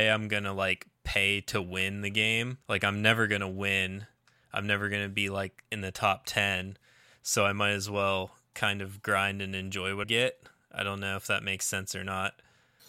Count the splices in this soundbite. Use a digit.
3